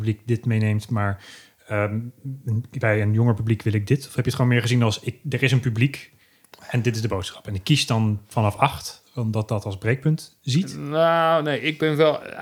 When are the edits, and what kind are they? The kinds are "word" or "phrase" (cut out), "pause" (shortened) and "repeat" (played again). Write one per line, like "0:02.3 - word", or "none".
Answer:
none